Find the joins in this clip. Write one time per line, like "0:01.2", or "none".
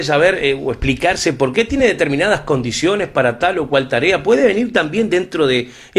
none